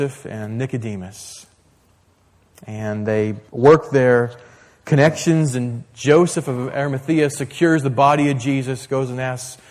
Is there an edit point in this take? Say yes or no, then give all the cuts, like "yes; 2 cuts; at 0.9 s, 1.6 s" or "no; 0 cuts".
yes; 1 cut; at 3.5 s